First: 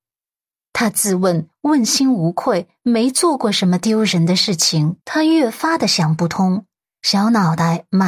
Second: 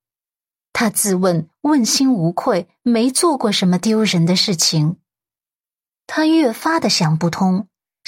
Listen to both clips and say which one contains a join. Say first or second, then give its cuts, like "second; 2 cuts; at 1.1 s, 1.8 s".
first; 1 cut; at 5.0 s